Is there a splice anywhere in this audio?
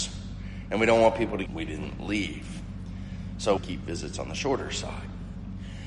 yes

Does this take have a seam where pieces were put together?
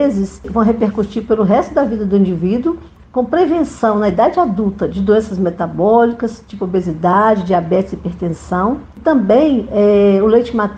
no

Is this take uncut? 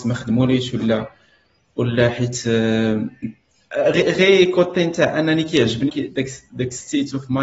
no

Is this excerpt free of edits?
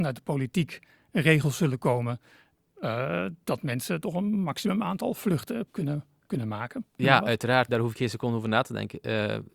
no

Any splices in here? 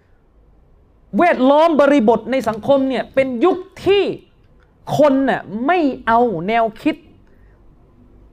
no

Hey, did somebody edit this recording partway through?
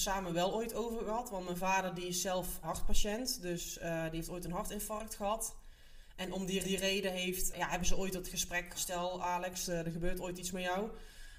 yes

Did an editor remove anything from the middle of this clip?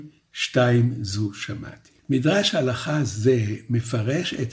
yes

